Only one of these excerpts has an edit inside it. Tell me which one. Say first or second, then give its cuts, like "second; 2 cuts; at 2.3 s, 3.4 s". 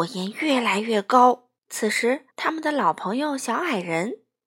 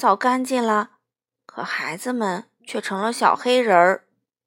first; 2 cuts; at 1.6 s, 2.3 s